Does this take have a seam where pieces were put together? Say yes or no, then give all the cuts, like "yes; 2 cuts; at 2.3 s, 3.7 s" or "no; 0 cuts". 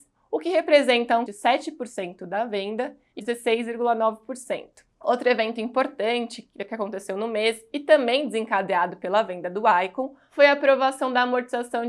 yes; 2 cuts; at 1.3 s, 3.2 s